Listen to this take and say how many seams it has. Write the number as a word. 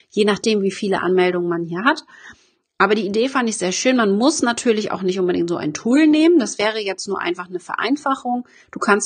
zero